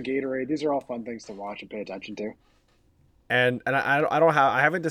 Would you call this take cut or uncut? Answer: uncut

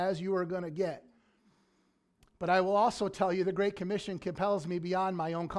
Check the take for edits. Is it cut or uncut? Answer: uncut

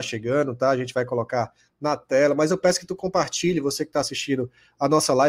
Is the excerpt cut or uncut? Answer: uncut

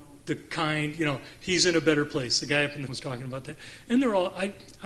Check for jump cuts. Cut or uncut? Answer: cut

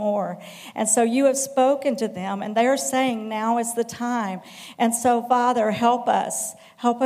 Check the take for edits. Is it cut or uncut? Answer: uncut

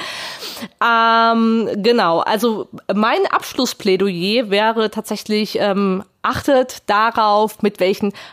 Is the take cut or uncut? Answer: uncut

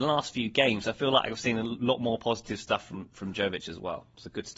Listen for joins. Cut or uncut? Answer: uncut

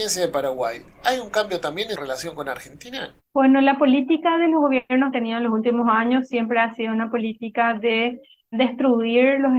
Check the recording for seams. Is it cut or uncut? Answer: cut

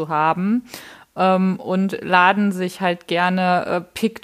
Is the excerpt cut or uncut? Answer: uncut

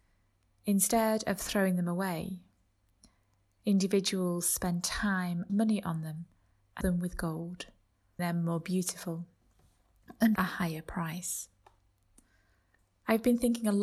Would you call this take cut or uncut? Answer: cut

